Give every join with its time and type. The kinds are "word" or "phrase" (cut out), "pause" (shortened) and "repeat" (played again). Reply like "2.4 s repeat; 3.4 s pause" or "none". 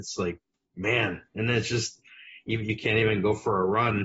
none